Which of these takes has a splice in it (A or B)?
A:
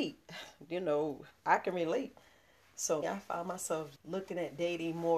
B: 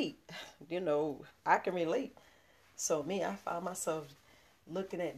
A